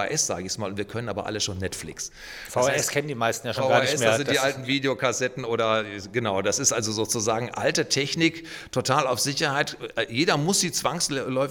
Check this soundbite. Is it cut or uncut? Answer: uncut